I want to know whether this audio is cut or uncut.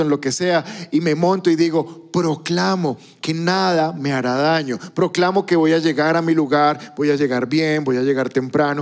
uncut